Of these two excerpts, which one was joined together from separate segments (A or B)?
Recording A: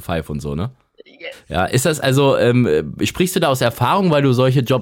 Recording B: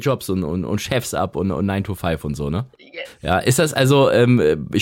B